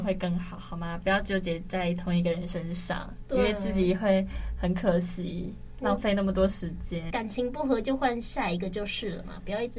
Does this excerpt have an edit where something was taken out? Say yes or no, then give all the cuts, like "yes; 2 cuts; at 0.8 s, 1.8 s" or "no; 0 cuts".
yes; 1 cut; at 7.1 s